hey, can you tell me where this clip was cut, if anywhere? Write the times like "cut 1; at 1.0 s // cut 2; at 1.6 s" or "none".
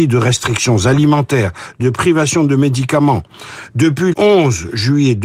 cut 1; at 1.8 s // cut 2; at 4.1 s